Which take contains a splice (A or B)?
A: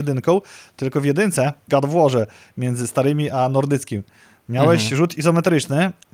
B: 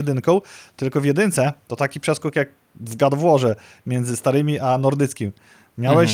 A